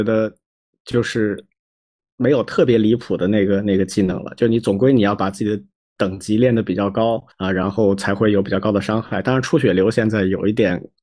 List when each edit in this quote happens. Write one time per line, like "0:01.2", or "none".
0:07.3

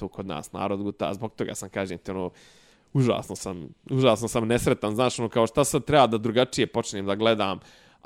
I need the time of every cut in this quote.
none

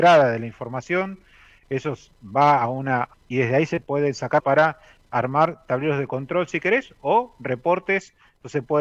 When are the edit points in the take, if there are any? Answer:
0:03.1
0:03.8
0:04.4

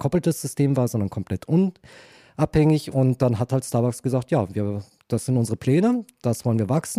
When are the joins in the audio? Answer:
none

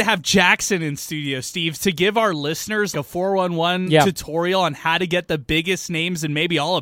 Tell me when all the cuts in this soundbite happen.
0:02.9

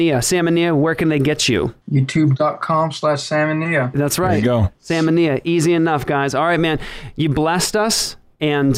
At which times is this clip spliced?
0:01.8

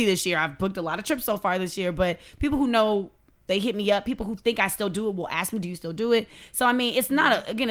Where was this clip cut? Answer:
none

